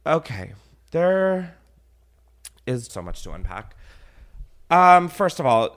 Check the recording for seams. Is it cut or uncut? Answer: cut